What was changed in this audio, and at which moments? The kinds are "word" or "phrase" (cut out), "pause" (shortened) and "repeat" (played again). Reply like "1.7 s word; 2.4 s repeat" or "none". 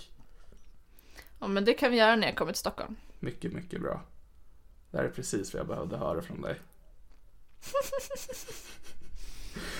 none